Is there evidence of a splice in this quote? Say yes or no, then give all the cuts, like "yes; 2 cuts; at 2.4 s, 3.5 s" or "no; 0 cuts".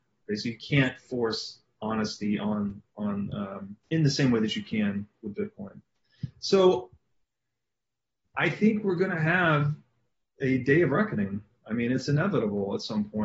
yes; 1 cut; at 3.8 s